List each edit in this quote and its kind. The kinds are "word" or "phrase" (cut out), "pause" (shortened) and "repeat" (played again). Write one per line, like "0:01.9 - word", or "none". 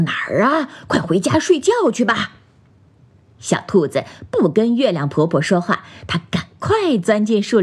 none